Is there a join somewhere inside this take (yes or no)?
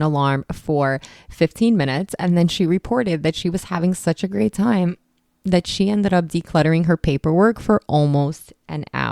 no